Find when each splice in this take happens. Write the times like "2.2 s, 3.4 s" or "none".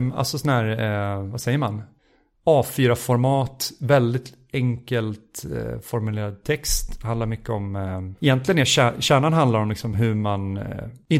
none